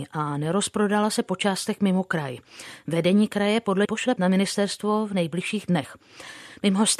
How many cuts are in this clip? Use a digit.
2